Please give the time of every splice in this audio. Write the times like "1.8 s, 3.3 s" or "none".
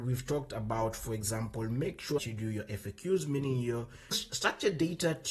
2.2 s, 4.1 s

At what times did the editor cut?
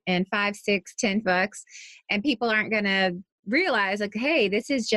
1.2 s

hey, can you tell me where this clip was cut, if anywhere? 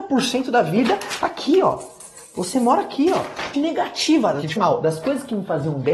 3.5 s, 4.6 s

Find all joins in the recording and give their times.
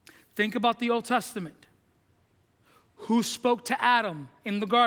none

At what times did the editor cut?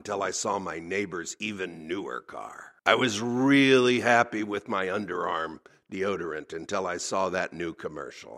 2.8 s

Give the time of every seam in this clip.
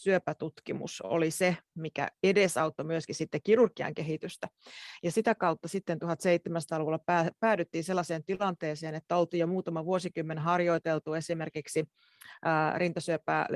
2.1 s

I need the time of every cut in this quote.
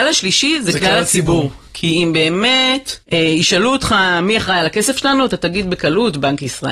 3.0 s

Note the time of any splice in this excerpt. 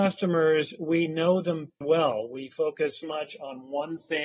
1.8 s, 3.0 s

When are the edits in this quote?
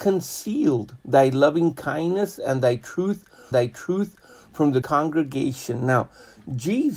1.0 s, 3.5 s, 4.8 s

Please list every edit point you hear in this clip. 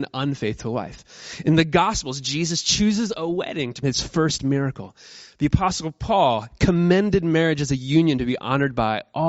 3.8 s

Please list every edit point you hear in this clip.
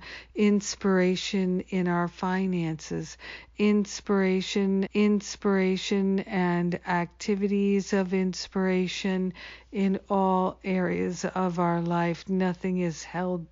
4.9 s

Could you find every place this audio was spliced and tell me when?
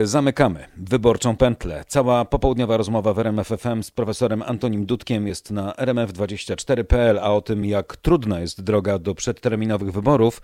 none

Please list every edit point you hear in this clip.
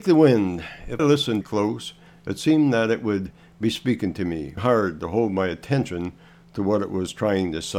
1.0 s, 1.4 s, 4.6 s

